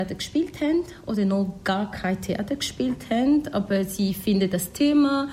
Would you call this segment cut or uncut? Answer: uncut